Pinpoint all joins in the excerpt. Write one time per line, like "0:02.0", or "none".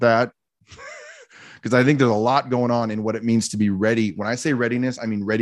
none